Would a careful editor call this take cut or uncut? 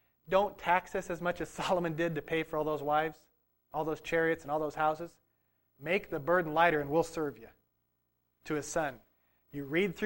uncut